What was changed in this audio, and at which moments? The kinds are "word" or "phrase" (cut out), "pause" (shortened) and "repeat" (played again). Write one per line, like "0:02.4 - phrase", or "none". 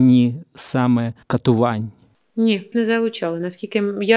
0:01.2 - pause
0:02.7 - phrase